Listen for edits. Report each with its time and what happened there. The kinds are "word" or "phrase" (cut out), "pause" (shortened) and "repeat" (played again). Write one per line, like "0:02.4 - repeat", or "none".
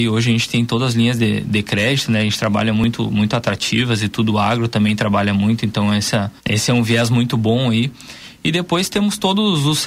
0:06.4 - pause